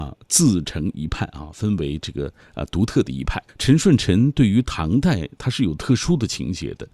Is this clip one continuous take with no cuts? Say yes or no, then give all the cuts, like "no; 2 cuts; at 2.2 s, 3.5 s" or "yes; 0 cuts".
no; 1 cut; at 3.5 s